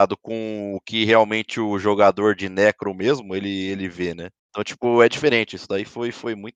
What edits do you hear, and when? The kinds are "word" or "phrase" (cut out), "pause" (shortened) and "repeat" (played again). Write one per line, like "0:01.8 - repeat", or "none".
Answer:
0:04.4 - pause